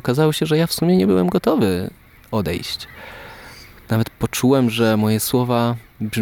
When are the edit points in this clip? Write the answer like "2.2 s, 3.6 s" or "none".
none

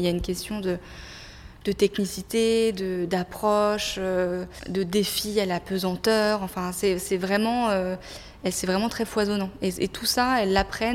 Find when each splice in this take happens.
none

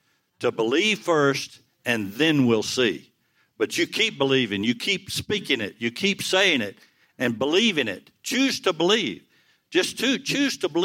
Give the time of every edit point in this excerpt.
none

